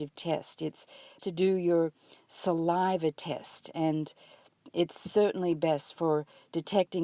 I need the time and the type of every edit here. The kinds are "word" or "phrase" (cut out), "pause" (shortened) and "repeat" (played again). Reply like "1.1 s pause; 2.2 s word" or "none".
1.2 s word